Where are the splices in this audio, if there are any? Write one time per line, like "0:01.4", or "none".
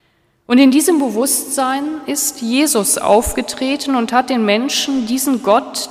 none